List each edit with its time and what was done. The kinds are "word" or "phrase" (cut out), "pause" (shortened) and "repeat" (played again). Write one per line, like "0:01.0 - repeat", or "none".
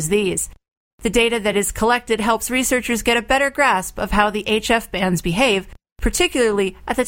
none